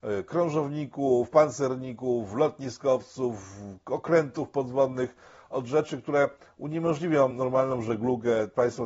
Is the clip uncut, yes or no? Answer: yes